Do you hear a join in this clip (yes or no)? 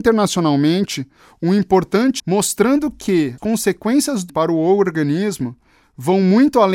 yes